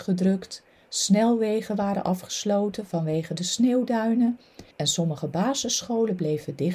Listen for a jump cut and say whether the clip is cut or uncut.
cut